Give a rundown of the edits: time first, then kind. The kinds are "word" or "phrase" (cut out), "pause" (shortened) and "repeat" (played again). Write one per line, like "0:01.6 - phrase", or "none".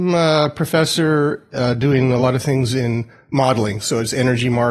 none